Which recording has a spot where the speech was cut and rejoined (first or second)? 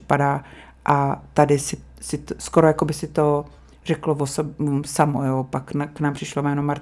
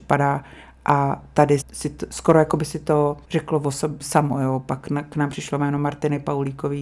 second